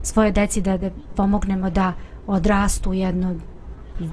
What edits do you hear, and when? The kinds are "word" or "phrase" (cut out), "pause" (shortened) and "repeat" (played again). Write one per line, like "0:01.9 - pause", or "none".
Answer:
0:01.1 - word